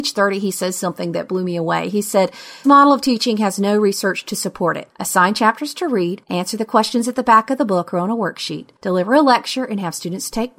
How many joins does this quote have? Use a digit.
1